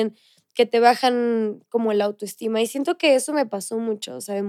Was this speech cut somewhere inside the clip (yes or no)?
no